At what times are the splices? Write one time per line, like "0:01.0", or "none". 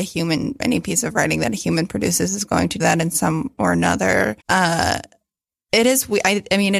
0:02.8
0:03.6
0:04.4

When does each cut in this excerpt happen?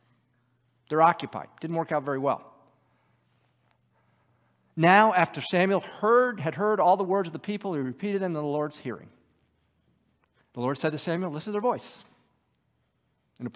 none

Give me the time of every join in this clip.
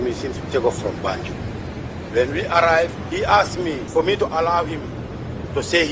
none

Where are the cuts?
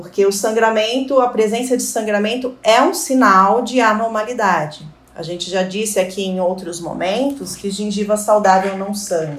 none

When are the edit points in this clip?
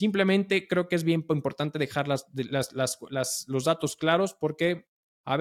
none

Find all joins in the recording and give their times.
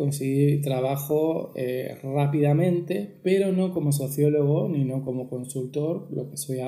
none

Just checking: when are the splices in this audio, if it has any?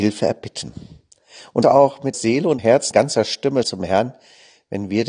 0:01.6
0:02.1
0:02.6
0:02.9
0:03.6

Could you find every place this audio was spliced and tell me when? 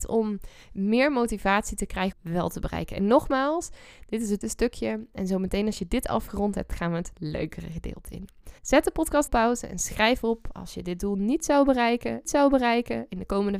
0:02.1
0:04.4
0:08.6
0:09.3
0:12.2

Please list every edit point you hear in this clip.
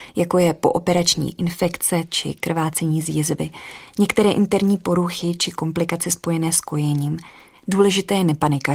none

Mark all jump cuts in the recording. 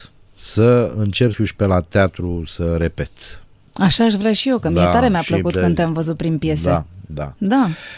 0:01.3

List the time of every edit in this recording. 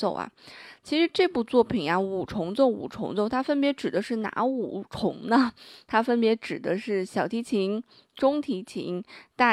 none

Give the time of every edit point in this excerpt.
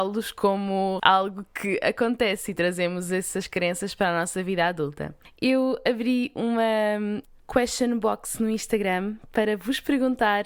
0:01.0

